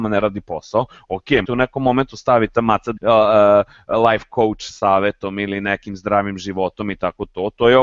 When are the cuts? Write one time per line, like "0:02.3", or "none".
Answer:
0:01.4
0:02.5
0:03.0